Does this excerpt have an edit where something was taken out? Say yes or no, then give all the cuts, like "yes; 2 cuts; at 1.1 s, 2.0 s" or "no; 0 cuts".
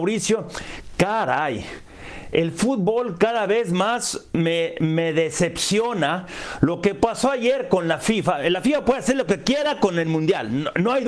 no; 0 cuts